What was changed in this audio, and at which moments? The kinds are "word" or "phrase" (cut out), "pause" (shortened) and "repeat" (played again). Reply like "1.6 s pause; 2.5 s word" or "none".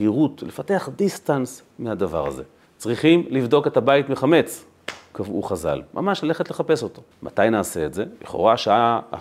2.6 s pause; 7.1 s pause